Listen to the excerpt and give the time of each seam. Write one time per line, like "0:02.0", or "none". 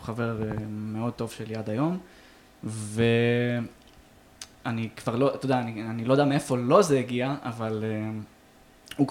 none